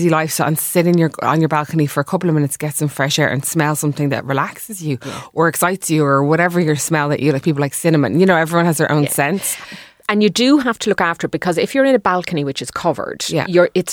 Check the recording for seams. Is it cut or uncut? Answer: uncut